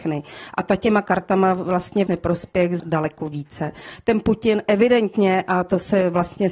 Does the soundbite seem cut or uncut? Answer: cut